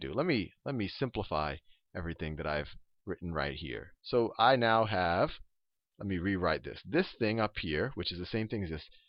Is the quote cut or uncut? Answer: uncut